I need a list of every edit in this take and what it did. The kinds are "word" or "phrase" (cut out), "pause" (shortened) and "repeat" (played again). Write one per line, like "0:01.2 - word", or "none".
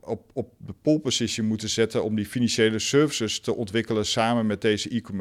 none

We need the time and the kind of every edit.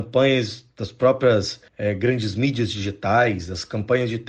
0:01.7 - pause

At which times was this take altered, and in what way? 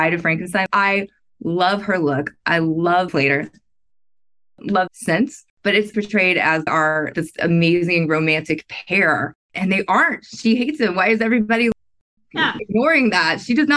0:03.1 - phrase
0:04.9 - phrase
0:05.5 - pause
0:05.9 - word
0:06.7 - word
0:09.4 - pause

